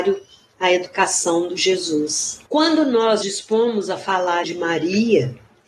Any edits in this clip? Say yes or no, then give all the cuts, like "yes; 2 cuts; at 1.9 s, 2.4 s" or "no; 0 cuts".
yes; 4 cuts; at 1.6 s, 2.5 s, 3.2 s, 4.4 s